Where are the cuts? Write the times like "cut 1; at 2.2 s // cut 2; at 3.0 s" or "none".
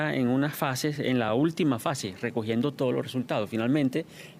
none